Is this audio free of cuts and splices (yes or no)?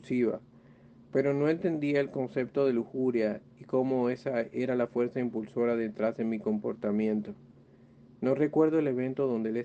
yes